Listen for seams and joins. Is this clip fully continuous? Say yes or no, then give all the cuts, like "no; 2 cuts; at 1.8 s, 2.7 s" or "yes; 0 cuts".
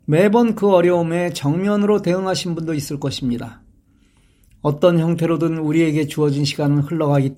yes; 0 cuts